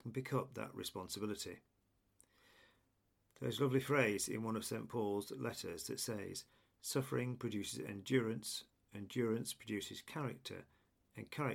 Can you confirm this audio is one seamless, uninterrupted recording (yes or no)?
yes